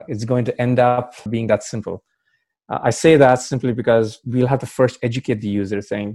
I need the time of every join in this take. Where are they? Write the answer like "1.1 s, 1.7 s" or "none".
1.3 s